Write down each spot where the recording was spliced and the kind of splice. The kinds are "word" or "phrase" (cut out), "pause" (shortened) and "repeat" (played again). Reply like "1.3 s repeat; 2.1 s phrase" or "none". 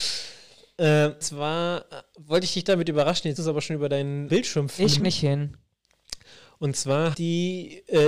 1.2 s word; 3.4 s word; 4.3 s word; 5.0 s word; 7.1 s word